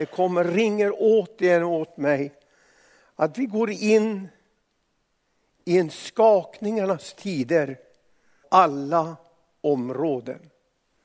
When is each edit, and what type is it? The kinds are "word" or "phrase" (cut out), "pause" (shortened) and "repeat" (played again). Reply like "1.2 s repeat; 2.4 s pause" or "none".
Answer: 8.4 s word